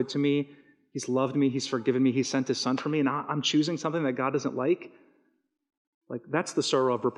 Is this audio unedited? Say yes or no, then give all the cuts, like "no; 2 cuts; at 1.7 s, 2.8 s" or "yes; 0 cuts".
yes; 0 cuts